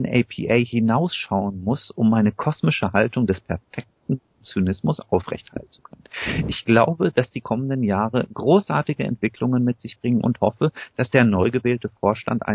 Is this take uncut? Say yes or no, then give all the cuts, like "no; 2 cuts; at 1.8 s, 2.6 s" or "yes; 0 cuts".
yes; 0 cuts